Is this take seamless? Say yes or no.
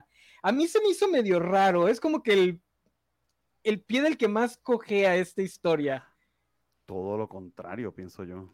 yes